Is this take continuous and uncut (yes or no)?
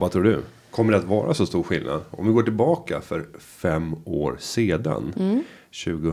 yes